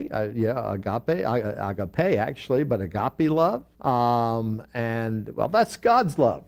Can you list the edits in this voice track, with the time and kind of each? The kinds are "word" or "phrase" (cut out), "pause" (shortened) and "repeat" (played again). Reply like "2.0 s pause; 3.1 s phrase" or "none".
3.7 s pause